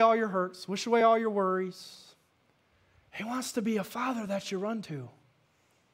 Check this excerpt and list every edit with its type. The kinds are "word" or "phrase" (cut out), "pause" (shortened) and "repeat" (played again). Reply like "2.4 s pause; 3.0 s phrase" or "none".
none

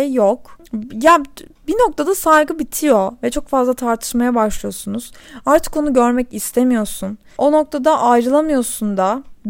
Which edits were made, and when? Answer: none

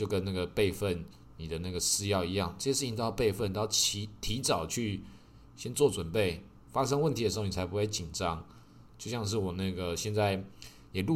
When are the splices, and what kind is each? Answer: 6.6 s pause

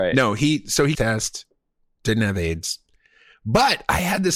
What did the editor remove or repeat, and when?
0.9 s phrase

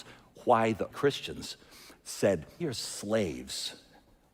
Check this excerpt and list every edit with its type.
0.9 s word; 2.6 s word

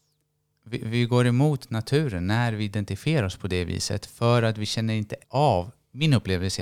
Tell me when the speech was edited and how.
5.2 s pause

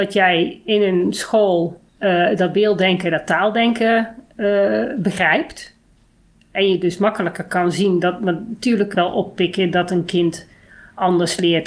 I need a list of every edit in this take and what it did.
1.9 s pause; 8.9 s phrase

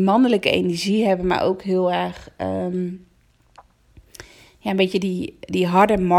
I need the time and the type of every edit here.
none

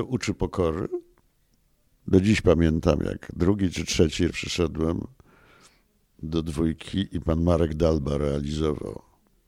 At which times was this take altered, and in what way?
4.3 s word

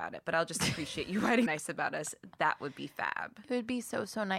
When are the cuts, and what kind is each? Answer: 1.5 s word

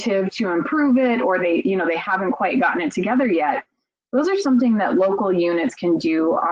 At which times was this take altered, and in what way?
none

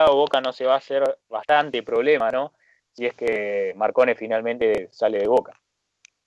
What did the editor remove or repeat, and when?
none

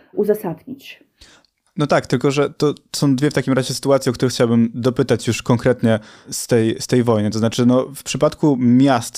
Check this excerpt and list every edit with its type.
none

